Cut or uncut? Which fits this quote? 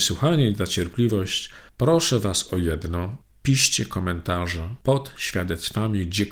uncut